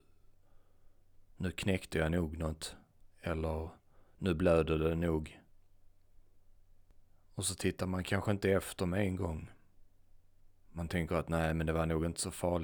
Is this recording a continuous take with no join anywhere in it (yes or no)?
yes